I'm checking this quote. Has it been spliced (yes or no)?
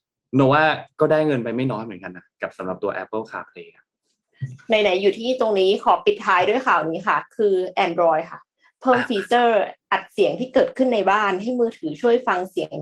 no